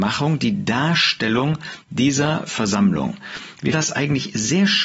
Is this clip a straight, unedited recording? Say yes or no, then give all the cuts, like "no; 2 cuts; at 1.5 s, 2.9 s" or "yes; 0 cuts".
no; 2 cuts; at 2.5 s, 3.7 s